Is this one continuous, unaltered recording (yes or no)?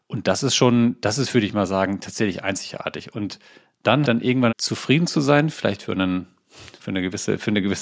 no